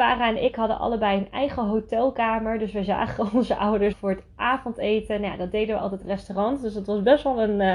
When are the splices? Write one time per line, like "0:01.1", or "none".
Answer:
0:03.9
0:06.0